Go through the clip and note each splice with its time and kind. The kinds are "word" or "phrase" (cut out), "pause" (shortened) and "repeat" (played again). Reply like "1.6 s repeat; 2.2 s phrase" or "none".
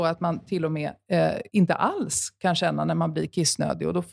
1.5 s pause